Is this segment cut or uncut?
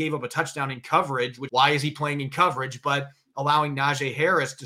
cut